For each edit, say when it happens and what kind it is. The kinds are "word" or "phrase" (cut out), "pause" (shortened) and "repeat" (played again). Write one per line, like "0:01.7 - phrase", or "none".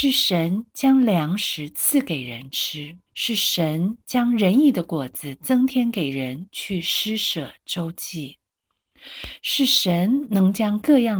0:03.1 - pause

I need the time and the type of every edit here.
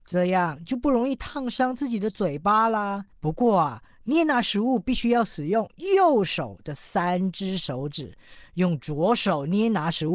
0:03.1 - pause

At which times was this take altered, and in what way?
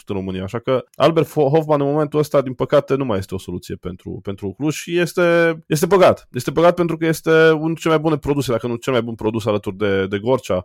0:05.6 - pause

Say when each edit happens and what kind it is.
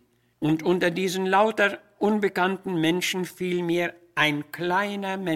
none

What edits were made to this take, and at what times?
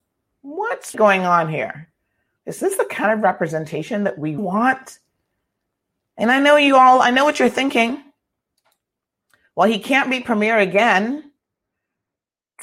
0:00.9 - word
0:04.4 - word

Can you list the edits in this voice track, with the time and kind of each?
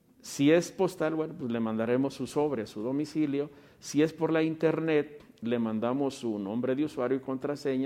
none

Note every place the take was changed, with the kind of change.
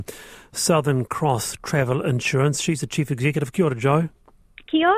none

